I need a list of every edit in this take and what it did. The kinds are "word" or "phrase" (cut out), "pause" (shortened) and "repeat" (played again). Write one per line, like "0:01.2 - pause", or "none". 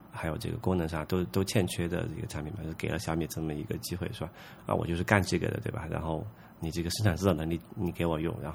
none